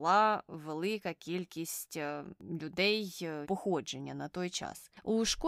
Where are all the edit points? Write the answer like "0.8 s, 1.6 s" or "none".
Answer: 3.4 s